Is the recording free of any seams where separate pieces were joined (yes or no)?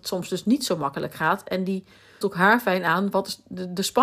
no